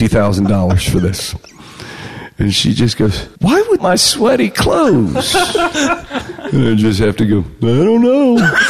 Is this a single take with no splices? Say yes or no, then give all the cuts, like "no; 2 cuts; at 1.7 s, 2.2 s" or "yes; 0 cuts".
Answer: no; 2 cuts; at 3.4 s, 3.8 s